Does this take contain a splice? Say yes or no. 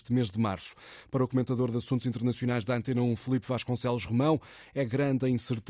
no